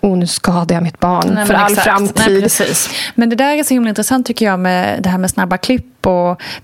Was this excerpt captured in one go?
yes; 0 cuts

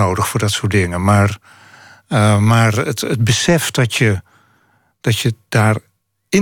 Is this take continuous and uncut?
yes; 0 cuts

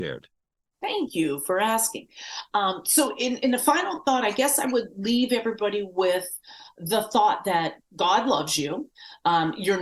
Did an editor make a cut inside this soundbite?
no; 0 cuts

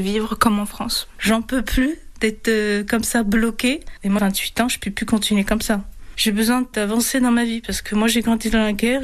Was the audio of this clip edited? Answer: yes; 1 cut; at 4.2 s

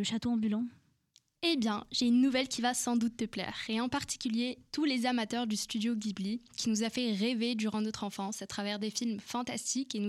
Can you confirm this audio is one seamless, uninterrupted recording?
yes; 0 cuts

